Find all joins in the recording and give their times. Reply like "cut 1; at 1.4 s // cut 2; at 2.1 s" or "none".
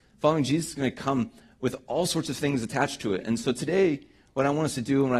none